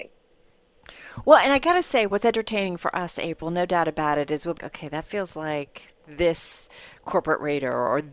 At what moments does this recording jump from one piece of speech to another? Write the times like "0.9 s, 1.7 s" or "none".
4.6 s